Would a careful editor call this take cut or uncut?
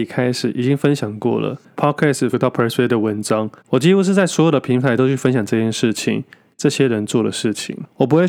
cut